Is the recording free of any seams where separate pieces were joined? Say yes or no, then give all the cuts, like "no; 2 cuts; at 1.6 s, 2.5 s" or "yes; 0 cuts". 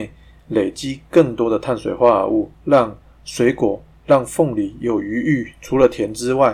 no; 1 cut; at 2.5 s